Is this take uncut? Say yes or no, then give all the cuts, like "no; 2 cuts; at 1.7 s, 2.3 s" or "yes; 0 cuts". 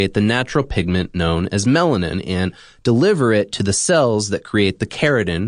yes; 0 cuts